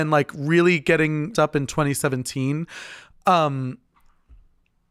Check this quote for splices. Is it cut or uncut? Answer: cut